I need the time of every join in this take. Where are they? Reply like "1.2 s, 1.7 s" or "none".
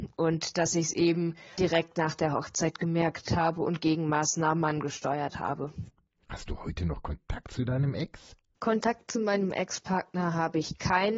1.6 s